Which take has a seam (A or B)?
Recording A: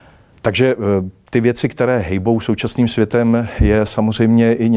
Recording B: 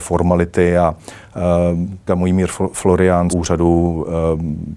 B